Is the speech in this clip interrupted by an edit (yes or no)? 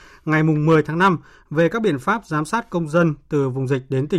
no